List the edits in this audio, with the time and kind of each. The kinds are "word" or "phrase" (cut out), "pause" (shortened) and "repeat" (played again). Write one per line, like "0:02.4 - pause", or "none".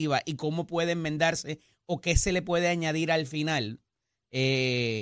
none